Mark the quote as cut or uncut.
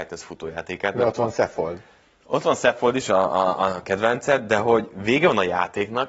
uncut